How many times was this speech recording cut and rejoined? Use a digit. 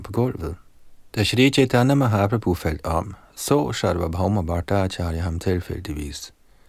1